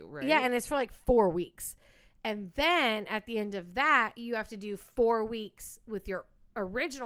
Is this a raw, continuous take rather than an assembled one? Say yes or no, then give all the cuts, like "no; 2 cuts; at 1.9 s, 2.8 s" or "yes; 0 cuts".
yes; 0 cuts